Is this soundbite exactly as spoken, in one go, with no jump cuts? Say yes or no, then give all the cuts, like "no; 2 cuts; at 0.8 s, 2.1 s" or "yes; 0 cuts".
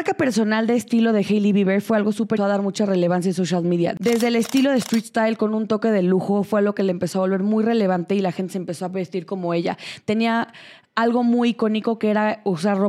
no; 1 cut; at 2.4 s